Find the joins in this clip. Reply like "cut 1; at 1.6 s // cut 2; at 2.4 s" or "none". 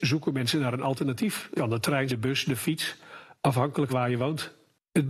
cut 1; at 1.6 s // cut 2; at 2.1 s // cut 3; at 3.9 s